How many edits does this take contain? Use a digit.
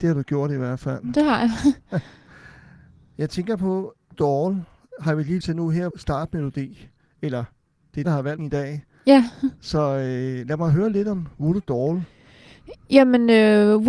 5